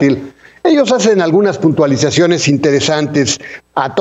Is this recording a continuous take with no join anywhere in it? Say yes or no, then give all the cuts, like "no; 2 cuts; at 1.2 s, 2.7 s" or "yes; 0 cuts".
yes; 0 cuts